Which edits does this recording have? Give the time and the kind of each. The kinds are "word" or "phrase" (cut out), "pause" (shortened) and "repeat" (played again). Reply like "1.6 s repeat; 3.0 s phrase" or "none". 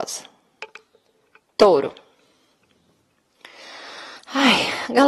none